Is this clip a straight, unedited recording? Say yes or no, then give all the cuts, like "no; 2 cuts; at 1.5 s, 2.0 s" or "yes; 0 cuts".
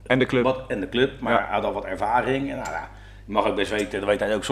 yes; 0 cuts